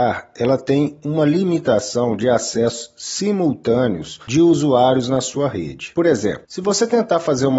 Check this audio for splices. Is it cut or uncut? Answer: uncut